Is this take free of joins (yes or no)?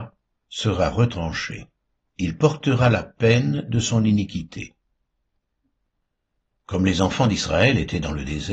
yes